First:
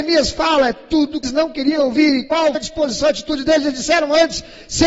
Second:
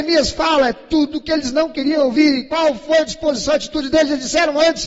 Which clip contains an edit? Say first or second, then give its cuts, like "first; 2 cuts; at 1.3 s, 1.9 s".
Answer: first; 2 cuts; at 1.2 s, 2.5 s